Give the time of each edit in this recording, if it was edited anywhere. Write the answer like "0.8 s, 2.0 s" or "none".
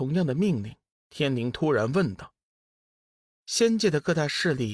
0.9 s